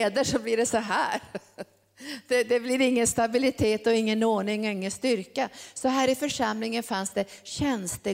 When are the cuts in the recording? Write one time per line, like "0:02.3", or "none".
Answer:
none